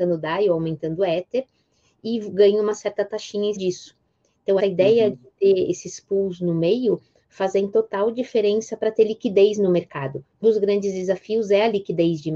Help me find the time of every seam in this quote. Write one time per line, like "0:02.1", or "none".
0:03.6
0:04.6
0:10.4